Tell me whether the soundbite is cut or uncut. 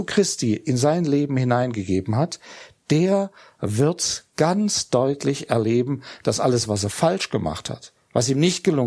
uncut